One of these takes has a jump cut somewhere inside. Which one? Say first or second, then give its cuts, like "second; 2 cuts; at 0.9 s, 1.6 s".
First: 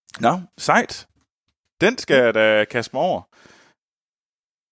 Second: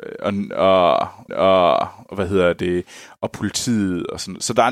second; 1 cut; at 1.3 s